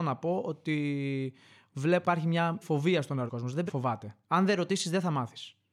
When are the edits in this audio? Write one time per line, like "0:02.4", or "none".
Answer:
0:02.0
0:02.6
0:03.3
0:03.7
0:04.2